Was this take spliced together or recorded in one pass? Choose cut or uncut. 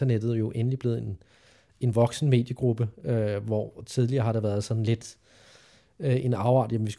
uncut